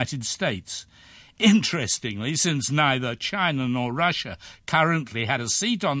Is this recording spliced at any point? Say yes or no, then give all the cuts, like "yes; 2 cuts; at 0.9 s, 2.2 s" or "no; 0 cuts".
no; 0 cuts